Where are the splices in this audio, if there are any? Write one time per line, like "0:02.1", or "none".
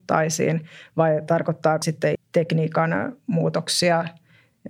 0:01.8
0:02.1